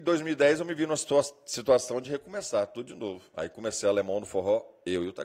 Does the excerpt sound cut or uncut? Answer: uncut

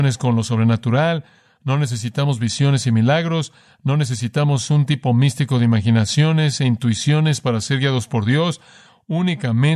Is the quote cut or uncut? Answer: uncut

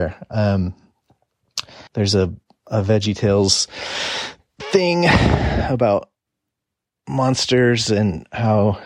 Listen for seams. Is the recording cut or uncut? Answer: cut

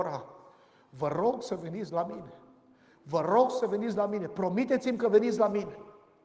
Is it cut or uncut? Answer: uncut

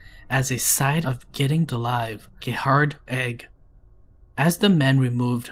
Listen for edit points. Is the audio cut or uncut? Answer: cut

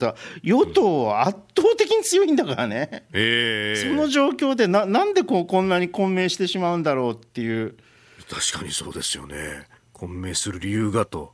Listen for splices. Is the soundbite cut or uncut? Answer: cut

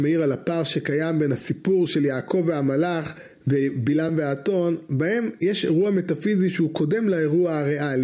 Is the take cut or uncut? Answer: uncut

